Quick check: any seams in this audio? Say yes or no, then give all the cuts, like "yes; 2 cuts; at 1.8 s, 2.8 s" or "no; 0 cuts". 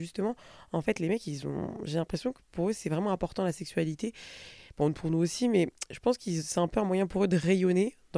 no; 0 cuts